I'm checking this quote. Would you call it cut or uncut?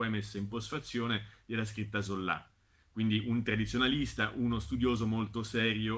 uncut